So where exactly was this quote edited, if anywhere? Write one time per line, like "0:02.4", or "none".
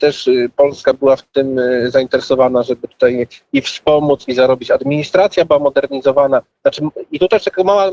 none

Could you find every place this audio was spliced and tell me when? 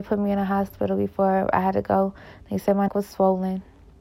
0:02.9

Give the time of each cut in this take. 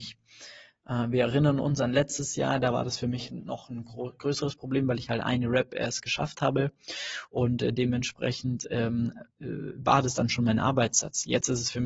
0:09.3

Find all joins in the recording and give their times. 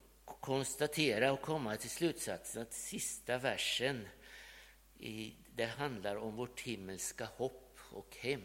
none

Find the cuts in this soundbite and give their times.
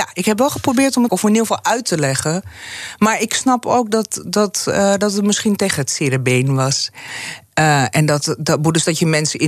0:01.1

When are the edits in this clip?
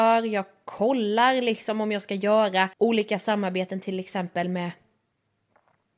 0:02.7

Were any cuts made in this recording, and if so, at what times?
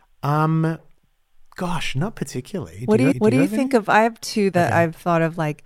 0:01.0
0:03.1
0:04.5

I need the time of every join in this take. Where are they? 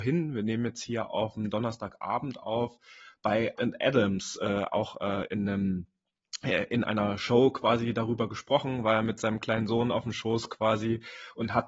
0:03.6
0:04.7

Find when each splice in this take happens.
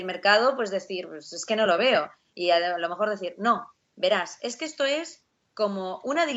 none

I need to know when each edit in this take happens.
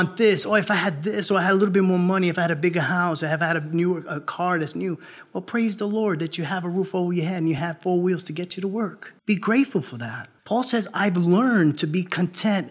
0:09.2
0:10.4

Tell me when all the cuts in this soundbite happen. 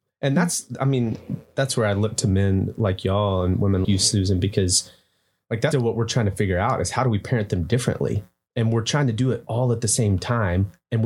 0:03.8
0:05.7

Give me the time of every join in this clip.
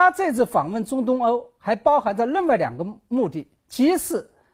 0:03.6

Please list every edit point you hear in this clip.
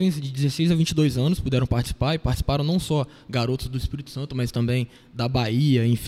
none

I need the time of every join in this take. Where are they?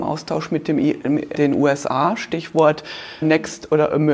0:01.3
0:03.2

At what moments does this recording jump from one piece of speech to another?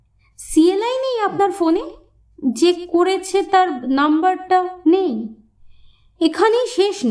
0:04.8

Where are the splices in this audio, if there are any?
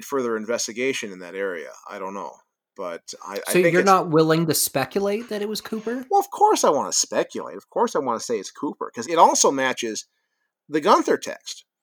0:09.0

